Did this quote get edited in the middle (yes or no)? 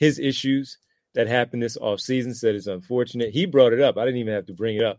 no